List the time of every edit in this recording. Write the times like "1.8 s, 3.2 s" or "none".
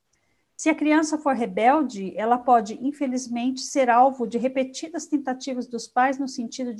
none